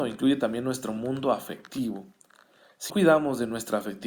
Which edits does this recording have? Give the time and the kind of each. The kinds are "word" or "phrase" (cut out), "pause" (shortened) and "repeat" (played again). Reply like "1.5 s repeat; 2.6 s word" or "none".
2.9 s word